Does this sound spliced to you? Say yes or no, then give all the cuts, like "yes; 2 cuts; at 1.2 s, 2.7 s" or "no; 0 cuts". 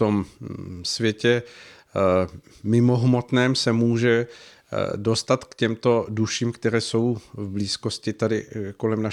no; 0 cuts